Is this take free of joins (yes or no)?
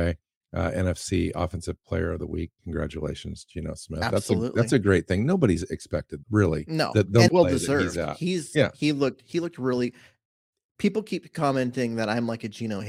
no